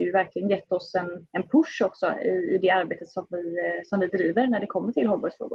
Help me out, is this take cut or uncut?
cut